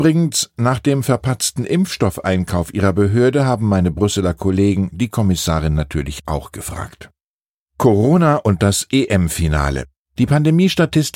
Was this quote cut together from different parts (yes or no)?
no